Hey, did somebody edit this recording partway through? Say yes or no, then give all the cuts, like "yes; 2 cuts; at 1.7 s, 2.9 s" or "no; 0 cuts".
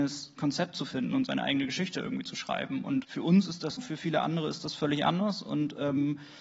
yes; 2 cuts; at 3.0 s, 3.8 s